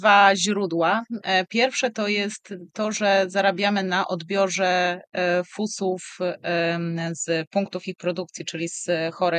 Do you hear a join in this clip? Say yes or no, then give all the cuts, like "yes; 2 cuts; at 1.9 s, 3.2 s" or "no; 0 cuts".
no; 0 cuts